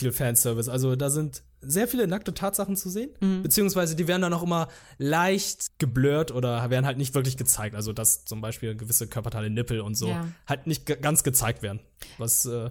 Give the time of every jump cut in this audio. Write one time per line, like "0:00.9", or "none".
0:05.7